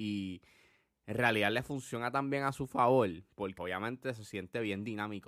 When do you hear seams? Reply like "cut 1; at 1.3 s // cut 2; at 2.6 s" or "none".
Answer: cut 1; at 3.6 s